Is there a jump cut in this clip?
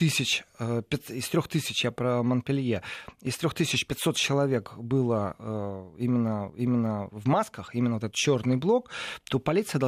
yes; 2 cuts; at 6.5 s, 8.1 s

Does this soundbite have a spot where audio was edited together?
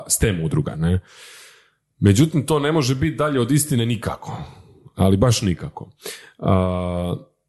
no; 0 cuts

